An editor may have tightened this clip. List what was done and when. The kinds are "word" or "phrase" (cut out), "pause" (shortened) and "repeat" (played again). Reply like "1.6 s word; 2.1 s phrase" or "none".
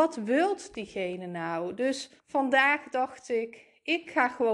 2.2 s pause